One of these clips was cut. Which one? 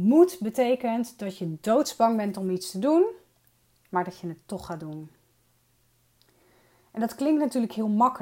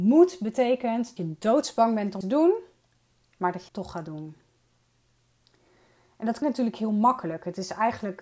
second; 4 cuts; at 1.2 s, 2.2 s, 3.7 s, 6.4 s

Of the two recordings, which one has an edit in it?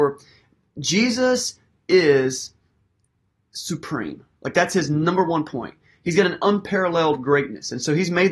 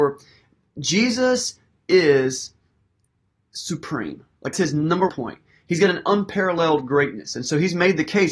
second; 2 cuts; at 4.5 s, 5.1 s

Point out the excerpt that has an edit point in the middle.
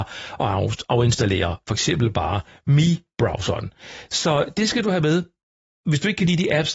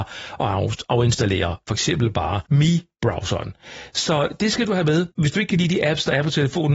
second; 2 cuts; at 2.5 s, 5.1 s

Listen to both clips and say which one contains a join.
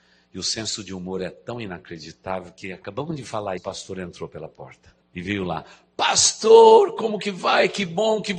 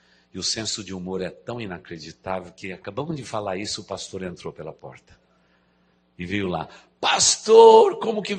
first; 2 cuts; at 3.6 s, 5.0 s

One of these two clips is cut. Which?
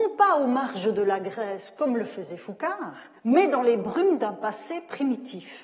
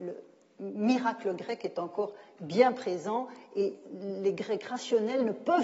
first; 1 cut; at 3.2 s

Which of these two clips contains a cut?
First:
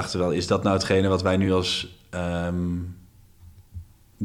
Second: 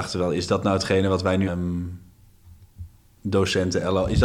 second; 1 cut; at 1.5 s

